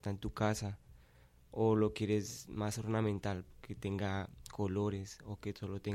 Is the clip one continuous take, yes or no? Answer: yes